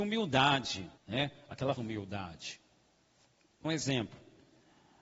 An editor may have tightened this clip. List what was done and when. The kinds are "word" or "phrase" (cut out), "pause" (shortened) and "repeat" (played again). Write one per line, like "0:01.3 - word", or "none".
0:01.0 - pause
0:01.8 - word
0:03.6 - word